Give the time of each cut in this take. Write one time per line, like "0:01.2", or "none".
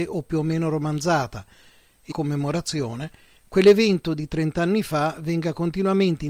0:02.1